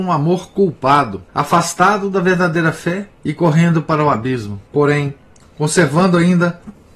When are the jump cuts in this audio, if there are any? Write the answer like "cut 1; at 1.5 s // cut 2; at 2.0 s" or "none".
cut 1; at 1.3 s // cut 2; at 3.1 s // cut 3; at 4.7 s